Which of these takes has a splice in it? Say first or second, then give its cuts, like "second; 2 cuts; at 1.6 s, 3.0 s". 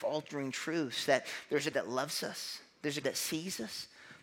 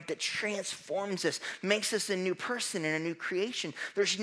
first; 2 cuts; at 1.7 s, 3.0 s